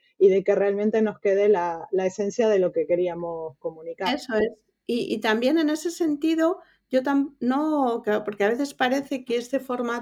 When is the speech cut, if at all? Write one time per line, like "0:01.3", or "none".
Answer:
none